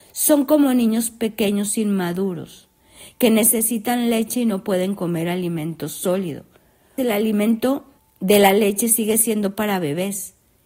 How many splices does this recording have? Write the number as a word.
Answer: two